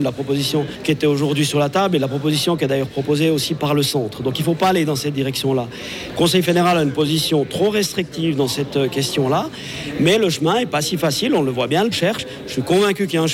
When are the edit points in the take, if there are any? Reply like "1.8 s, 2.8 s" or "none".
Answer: 11.9 s